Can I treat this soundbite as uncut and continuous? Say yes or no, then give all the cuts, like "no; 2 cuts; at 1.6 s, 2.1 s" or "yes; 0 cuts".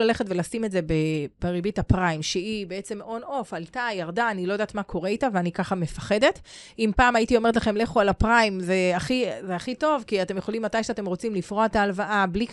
yes; 0 cuts